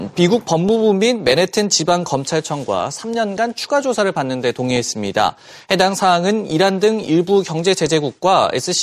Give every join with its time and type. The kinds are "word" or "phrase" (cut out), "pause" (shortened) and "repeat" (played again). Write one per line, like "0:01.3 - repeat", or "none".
none